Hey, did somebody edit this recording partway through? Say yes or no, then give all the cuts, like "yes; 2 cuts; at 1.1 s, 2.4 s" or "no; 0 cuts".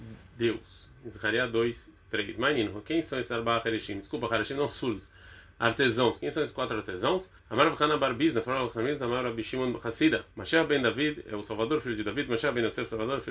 yes; 2 cuts; at 7.4 s, 10.3 s